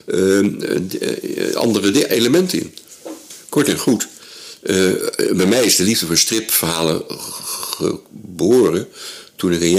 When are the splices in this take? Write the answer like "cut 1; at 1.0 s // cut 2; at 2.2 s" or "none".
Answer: none